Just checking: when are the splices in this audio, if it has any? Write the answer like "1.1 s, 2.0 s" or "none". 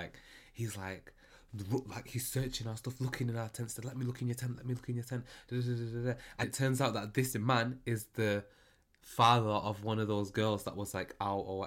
6.4 s